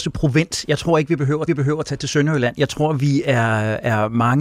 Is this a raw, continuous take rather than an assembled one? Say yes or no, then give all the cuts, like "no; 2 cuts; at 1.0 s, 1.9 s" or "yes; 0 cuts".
no; 1 cut; at 1.5 s